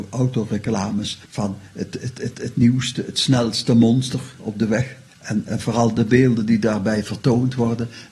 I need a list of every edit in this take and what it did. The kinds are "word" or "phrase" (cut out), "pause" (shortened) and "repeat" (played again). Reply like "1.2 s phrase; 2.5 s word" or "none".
1.3 s pause; 2.3 s repeat; 5.1 s pause